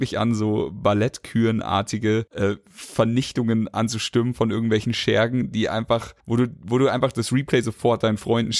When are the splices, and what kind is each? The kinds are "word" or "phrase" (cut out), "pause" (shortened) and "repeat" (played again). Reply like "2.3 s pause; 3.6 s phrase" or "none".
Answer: 2.3 s pause; 6.2 s pause